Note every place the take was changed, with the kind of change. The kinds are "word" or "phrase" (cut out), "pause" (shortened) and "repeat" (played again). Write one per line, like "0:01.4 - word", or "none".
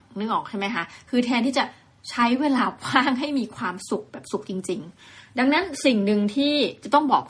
none